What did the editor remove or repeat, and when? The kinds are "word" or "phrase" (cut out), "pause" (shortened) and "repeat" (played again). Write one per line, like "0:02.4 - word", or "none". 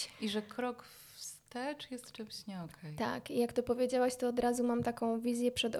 none